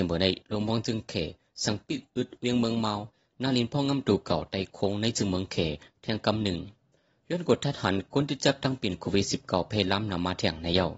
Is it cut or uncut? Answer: uncut